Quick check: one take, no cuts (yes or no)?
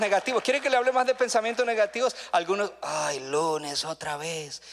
yes